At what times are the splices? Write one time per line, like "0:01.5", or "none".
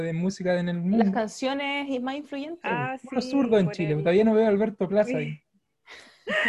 none